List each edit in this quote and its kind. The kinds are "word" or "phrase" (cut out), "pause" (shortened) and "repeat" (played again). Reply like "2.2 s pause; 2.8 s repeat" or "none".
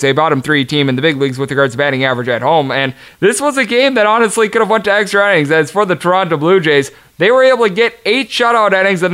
none